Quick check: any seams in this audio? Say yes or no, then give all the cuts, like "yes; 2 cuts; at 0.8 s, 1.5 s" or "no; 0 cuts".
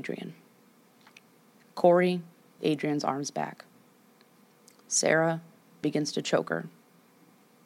yes; 2 cuts; at 2.6 s, 5.8 s